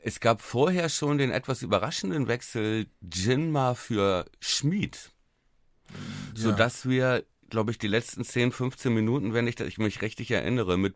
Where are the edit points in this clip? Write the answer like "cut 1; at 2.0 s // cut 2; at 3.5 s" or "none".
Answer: cut 1; at 2.9 s